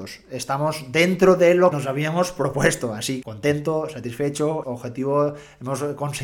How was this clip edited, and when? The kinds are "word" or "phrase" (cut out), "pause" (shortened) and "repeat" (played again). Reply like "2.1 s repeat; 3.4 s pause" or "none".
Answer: 1.7 s word; 3.2 s word; 4.6 s word